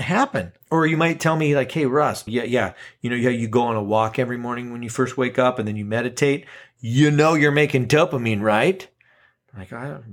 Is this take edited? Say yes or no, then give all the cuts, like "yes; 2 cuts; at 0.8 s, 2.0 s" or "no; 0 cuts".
yes; 1 cut; at 2.3 s